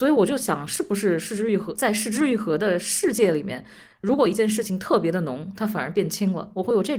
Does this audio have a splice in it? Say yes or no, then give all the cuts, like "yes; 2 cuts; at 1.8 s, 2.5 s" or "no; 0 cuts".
no; 0 cuts